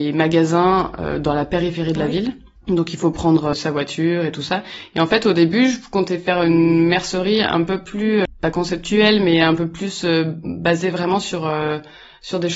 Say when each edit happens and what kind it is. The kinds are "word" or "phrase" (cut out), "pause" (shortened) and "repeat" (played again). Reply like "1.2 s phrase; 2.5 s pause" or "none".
2.6 s pause